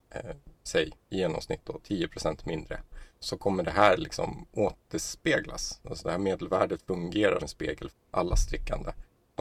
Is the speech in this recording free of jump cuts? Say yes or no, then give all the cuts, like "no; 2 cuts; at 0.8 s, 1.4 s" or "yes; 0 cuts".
no; 3 cuts; at 3.2 s, 7.4 s, 7.9 s